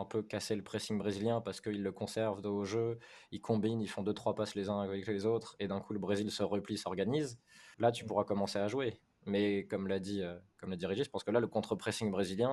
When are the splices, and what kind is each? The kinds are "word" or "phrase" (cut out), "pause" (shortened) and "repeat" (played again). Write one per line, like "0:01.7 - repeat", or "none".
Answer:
0:07.7 - pause

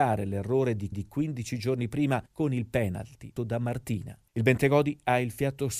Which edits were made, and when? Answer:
0:00.9 - repeat
0:02.3 - pause
0:03.4 - word
0:04.3 - pause

